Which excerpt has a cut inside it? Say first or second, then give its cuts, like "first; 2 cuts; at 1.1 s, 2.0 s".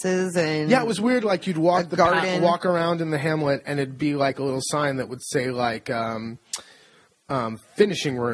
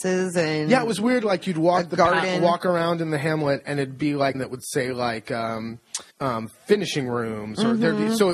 second; 2 cuts; at 4.3 s, 6.1 s